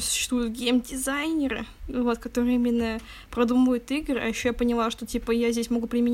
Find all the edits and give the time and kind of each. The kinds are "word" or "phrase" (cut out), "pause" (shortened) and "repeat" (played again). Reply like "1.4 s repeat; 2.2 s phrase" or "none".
1.8 s pause